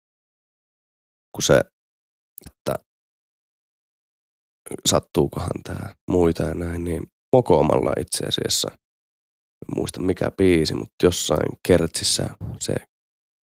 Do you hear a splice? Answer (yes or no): yes